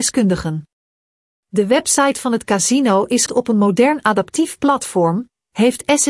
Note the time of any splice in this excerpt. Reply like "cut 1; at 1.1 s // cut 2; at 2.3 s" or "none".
cut 1; at 3.3 s